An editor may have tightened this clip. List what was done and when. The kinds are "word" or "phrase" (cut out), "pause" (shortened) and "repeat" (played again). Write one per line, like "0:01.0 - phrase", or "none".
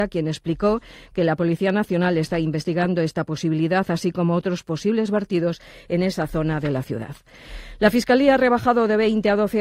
none